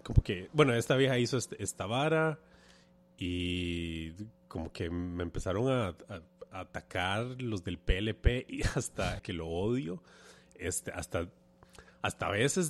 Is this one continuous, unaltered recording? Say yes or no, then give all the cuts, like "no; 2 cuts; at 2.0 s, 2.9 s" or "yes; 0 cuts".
no; 1 cut; at 9.2 s